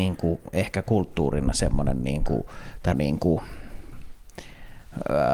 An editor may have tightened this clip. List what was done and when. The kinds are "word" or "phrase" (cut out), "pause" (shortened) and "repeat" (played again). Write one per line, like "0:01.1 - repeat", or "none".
0:02.9 - word

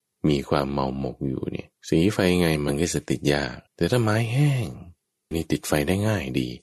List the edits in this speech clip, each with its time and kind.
0:01.8 - pause
0:03.7 - pause
0:05.3 - phrase

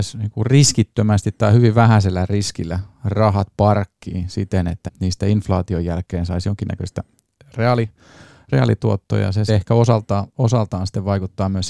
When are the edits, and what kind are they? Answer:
0:04.9 - word
0:09.5 - word

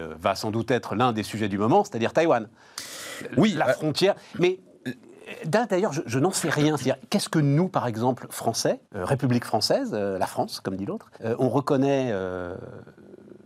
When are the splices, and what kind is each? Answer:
0:08.8 - pause
0:11.1 - pause

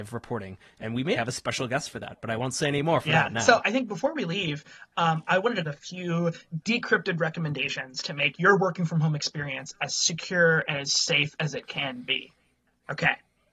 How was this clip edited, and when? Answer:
0:01.1 - word
0:05.6 - phrase

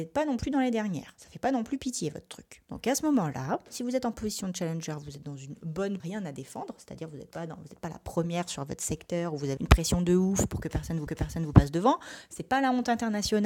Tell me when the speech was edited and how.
0:06.0 - phrase
0:09.6 - word
0:11.1 - repeat

